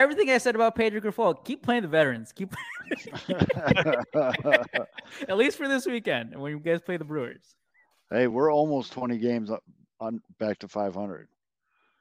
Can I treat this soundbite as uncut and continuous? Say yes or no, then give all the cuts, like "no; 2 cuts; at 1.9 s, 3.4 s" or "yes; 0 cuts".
yes; 0 cuts